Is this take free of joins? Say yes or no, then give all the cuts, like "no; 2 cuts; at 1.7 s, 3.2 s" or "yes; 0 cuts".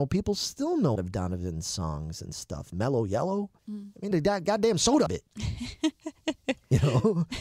no; 4 cuts; at 1.0 s, 3.6 s, 4.1 s, 5.1 s